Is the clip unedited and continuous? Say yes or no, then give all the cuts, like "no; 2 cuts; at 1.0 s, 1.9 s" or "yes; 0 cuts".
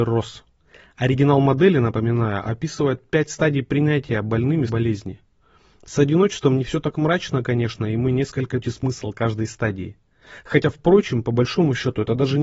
no; 2 cuts; at 4.7 s, 8.6 s